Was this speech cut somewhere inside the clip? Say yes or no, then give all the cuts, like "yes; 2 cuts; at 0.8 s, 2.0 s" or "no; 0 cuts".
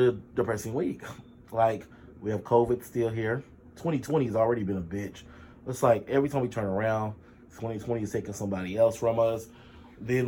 no; 0 cuts